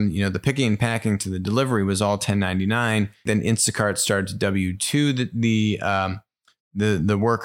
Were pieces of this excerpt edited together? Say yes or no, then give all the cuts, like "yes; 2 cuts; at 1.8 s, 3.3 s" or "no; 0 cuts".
no; 0 cuts